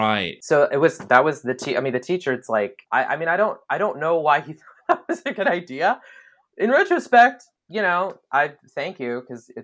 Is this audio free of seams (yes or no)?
yes